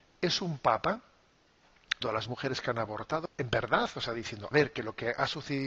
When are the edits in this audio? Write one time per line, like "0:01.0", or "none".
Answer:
0:02.0
0:03.3
0:04.5